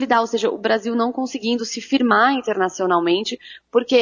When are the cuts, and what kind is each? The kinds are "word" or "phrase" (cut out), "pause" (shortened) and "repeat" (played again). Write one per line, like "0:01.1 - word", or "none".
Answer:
none